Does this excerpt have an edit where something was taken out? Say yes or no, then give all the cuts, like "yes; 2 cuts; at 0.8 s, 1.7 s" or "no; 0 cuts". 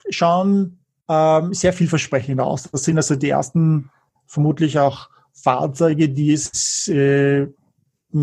no; 0 cuts